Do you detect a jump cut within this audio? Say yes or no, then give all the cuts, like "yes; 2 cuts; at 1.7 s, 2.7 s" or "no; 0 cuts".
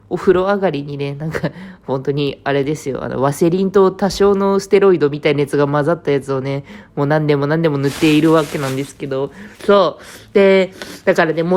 yes; 1 cut; at 9.6 s